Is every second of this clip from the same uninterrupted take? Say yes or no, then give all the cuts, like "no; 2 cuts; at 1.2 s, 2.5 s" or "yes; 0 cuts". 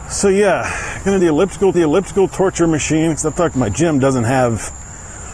no; 3 cuts; at 1.2 s, 1.7 s, 3.5 s